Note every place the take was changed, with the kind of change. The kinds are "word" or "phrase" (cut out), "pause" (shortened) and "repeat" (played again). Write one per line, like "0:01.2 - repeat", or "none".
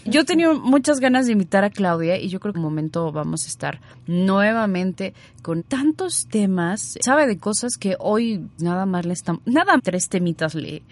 0:02.5 - phrase
0:05.6 - phrase
0:07.0 - word
0:08.6 - word
0:09.8 - word